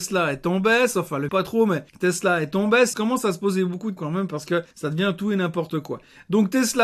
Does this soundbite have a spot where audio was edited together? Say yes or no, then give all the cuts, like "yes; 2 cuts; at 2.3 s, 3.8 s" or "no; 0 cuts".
yes; 5 cuts; at 1.3 s, 1.9 s, 2.9 s, 4.0 s, 4.7 s